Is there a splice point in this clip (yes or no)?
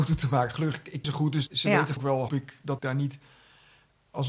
yes